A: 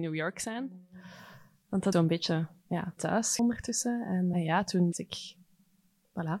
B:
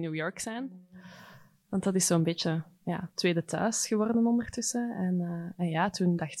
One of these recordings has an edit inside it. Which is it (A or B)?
A